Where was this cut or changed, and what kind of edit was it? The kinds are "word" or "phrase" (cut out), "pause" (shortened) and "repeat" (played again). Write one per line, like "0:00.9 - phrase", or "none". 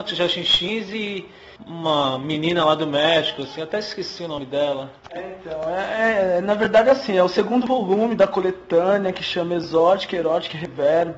0:01.6 - pause
0:05.0 - pause